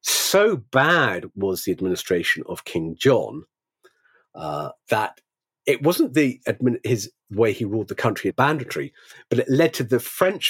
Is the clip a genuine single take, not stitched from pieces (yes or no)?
no